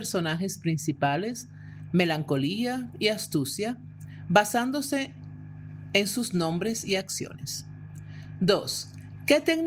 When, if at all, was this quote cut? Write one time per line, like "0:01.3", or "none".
none